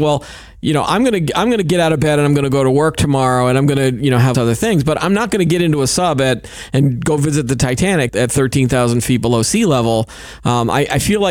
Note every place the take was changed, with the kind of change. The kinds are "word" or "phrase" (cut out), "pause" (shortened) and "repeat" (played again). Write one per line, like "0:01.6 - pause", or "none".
0:04.3 - phrase
0:08.1 - word